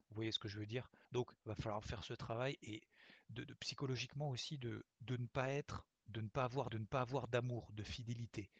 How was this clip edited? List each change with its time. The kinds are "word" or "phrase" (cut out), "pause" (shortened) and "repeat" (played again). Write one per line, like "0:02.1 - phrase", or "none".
0:01.0 - pause
0:01.8 - word
0:03.4 - word
0:04.9 - pause
0:06.0 - word
0:06.7 - repeat